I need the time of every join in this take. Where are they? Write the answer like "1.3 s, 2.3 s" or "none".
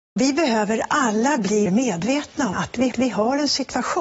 1.7 s, 2.5 s, 2.9 s